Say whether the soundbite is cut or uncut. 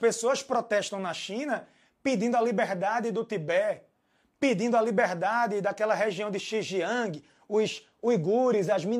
uncut